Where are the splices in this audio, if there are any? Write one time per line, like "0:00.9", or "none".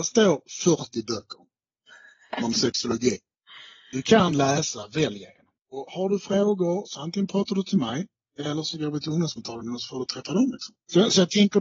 none